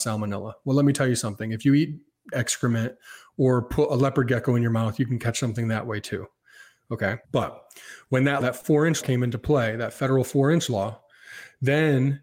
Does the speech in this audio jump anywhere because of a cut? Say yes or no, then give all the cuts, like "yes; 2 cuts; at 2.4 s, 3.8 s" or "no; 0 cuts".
yes; 4 cuts; at 2.3 s, 7.2 s, 8.4 s, 9.0 s